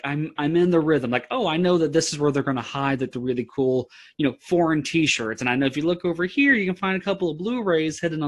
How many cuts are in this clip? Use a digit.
0